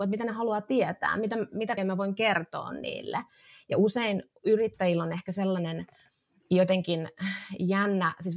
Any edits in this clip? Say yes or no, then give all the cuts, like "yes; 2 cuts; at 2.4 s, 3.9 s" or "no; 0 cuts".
yes; 1 cut; at 1.8 s